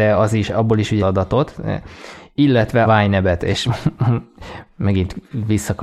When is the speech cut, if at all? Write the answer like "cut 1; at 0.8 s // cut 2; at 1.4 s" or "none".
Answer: cut 1; at 1.0 s // cut 2; at 2.8 s